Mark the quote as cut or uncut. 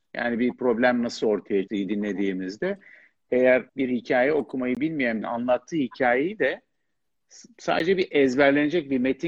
cut